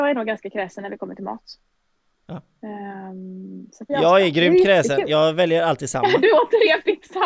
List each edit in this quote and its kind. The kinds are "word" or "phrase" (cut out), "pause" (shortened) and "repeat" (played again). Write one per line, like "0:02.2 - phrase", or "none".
0:03.9 - phrase